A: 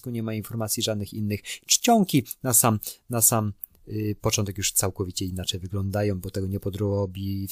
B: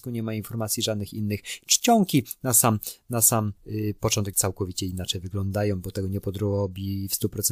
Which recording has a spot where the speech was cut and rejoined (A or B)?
B